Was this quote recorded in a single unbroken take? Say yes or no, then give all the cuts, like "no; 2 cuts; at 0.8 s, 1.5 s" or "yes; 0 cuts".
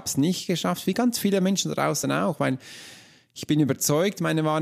yes; 0 cuts